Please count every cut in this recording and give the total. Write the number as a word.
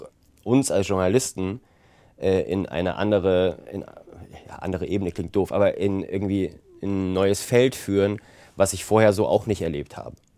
zero